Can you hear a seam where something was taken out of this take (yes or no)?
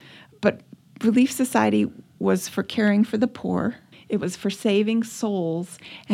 yes